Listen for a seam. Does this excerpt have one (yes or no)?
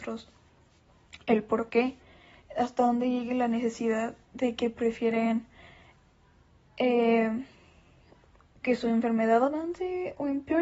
no